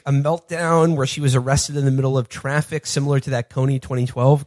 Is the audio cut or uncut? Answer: uncut